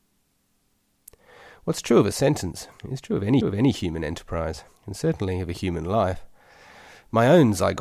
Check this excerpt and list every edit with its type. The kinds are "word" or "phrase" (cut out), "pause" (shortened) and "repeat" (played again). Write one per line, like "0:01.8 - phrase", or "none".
0:02.8 - pause
0:03.4 - repeat
0:04.7 - pause